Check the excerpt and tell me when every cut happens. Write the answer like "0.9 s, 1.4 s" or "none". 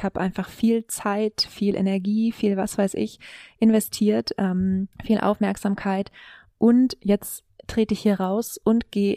4.9 s